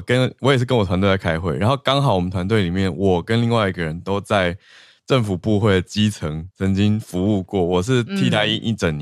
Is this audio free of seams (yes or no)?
no